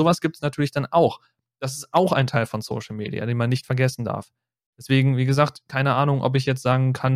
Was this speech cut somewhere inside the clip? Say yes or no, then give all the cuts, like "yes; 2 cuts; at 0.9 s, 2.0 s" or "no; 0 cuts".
no; 0 cuts